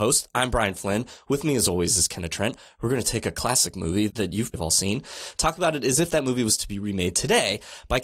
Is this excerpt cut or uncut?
cut